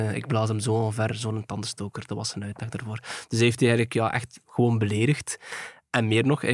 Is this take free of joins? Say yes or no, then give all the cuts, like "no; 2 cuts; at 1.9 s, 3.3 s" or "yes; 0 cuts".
yes; 0 cuts